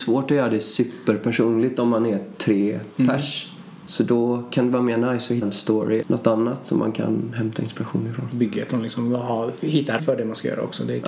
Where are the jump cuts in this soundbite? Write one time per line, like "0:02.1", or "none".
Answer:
0:05.4
0:06.0
0:10.0